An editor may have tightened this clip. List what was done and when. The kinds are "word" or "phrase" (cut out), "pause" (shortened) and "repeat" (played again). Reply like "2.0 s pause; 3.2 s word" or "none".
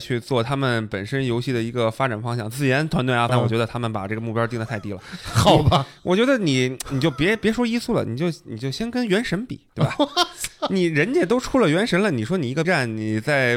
3.3 s phrase; 9.7 s pause; 12.6 s word

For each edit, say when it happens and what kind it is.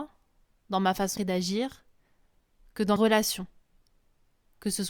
1.2 s word; 3.0 s word

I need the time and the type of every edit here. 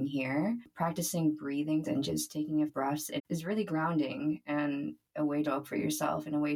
1.8 s word; 2.7 s word; 3.2 s phrase; 5.5 s word

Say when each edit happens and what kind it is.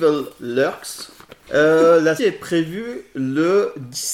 2.2 s word

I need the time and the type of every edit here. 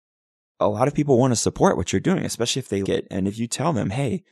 2.8 s word

